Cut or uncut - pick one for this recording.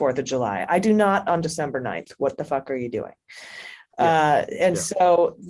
uncut